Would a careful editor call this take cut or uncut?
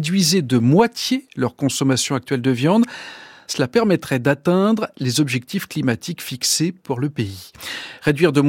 uncut